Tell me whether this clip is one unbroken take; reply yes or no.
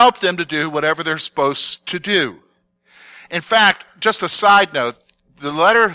yes